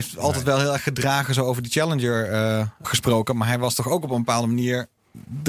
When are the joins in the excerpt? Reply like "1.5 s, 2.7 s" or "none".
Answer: 2.8 s